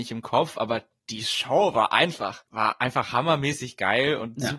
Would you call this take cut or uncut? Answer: uncut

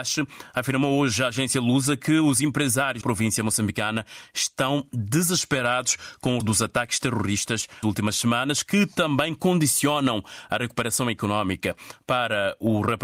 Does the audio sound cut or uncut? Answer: cut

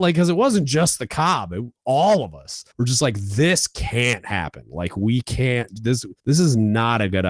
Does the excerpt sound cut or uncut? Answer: cut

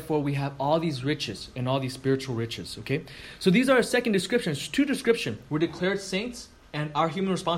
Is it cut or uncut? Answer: cut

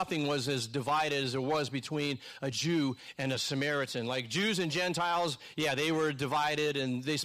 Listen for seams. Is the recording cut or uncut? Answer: uncut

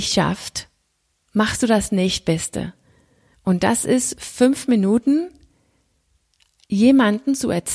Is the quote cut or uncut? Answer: uncut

